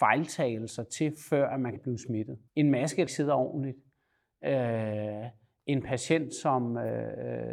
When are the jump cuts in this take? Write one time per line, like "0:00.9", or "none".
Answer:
0:01.8
0:02.5
0:03.1